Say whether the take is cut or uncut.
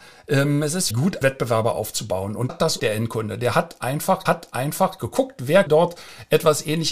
cut